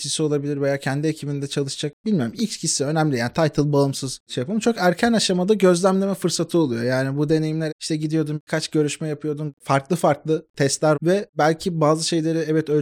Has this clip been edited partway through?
yes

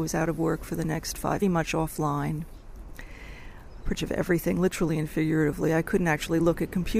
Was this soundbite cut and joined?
yes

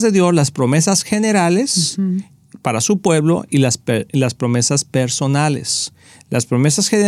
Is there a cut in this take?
no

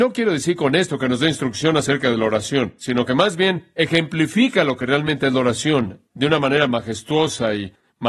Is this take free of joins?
yes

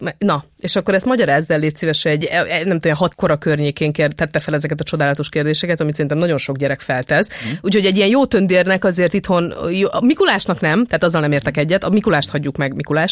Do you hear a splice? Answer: yes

